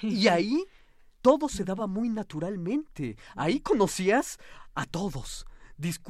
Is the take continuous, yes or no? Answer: yes